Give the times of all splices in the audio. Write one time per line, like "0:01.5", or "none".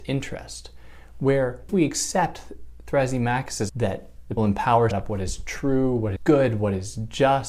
0:01.7
0:03.7
0:04.4
0:04.9
0:06.2

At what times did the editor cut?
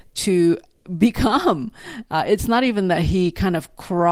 none

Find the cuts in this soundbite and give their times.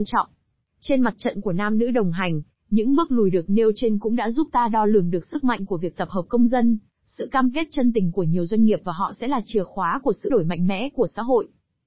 0:10.3

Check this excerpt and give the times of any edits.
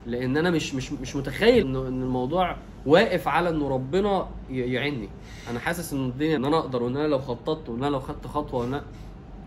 0:01.6
0:06.4

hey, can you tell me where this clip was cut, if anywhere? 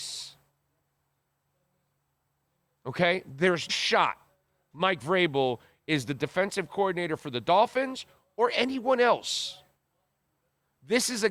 0:03.7

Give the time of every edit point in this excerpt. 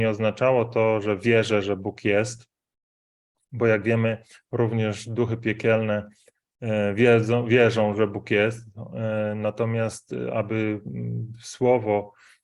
none

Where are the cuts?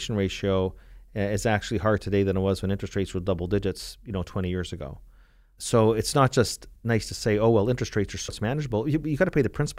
0:06.8
0:08.3

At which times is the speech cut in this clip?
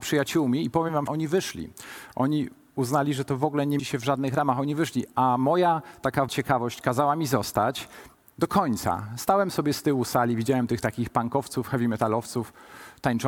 0:01.1
0:03.8
0:06.3

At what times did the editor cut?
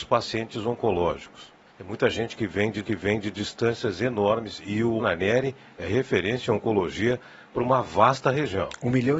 0:01.7
0:02.8
0:05.0

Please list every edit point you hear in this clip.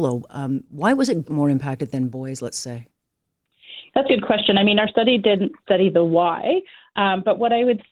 0:01.2
0:04.1
0:05.6

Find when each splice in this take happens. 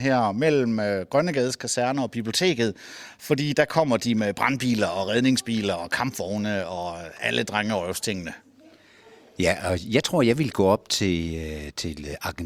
none

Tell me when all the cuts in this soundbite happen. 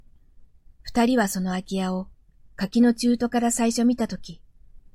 none

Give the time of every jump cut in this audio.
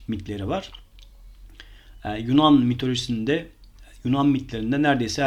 none

